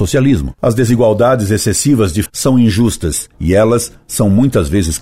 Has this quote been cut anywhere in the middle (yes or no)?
yes